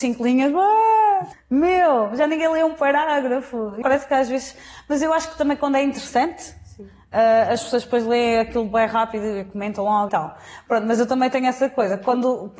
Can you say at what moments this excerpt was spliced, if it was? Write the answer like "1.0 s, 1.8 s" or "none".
1.3 s, 3.8 s, 10.1 s